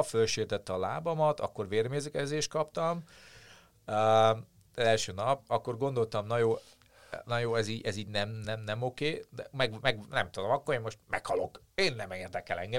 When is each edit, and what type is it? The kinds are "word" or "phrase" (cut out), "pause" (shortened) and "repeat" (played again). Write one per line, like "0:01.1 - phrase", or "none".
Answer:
none